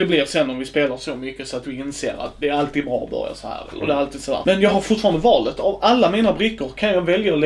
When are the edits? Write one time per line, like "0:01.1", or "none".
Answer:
none